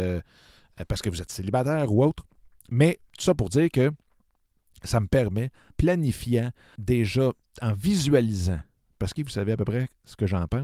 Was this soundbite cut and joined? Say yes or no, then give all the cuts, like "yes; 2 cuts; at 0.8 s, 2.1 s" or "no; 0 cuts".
yes; 3 cuts; at 5.7 s, 6.8 s, 9.2 s